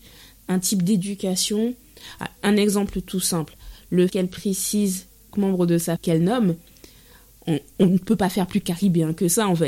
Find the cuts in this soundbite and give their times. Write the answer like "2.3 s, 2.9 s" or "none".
4.1 s, 5.3 s, 6.0 s

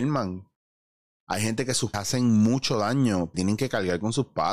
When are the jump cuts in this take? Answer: 1.9 s, 3.3 s

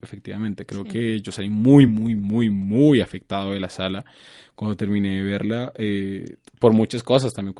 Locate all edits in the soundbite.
none

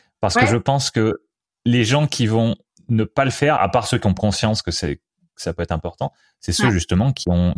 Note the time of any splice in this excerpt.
3.6 s, 4.2 s

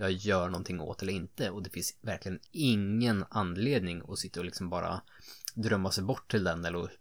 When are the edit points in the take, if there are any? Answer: 2.5 s

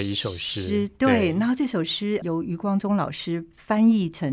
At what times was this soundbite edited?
2.2 s

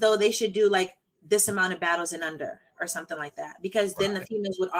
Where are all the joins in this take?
none

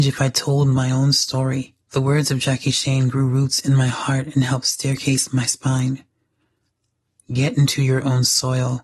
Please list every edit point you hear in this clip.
1.8 s

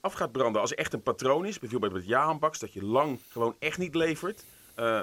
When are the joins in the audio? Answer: 3.2 s

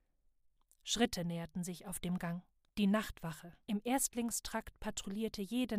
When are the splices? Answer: 2.7 s, 3.6 s

